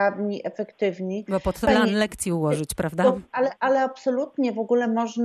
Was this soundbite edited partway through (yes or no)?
yes